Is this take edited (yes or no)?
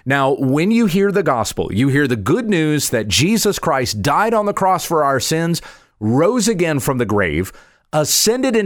no